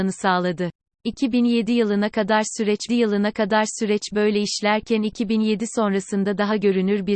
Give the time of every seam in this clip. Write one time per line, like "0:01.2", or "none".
0:02.9